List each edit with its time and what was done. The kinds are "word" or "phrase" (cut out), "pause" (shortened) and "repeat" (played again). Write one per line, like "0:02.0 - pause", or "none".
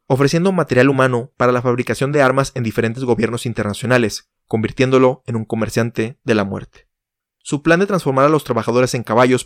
none